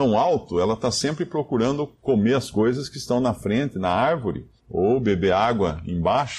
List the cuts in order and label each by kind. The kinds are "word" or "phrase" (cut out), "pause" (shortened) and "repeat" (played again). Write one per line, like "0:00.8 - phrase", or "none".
0:04.6 - pause